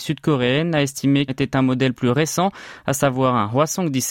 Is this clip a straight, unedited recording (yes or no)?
no